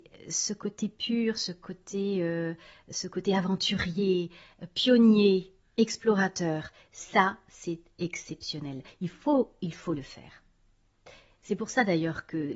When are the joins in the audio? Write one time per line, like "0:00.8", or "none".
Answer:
none